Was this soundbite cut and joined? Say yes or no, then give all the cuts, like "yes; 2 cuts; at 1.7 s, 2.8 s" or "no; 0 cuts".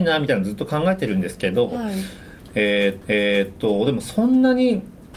yes; 1 cut; at 3.0 s